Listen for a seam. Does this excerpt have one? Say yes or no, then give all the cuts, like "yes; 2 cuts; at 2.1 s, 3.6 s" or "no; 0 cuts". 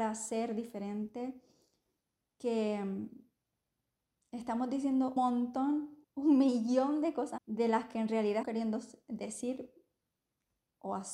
yes; 4 cuts; at 5.2 s, 6.0 s, 7.4 s, 8.4 s